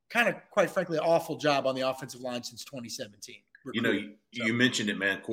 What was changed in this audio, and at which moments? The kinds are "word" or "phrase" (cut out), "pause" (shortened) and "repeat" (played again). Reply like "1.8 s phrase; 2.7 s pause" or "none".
4.3 s word